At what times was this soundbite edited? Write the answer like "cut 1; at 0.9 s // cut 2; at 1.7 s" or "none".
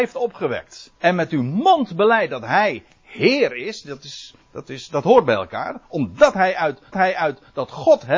cut 1; at 0.9 s // cut 2; at 4.4 s // cut 3; at 6.9 s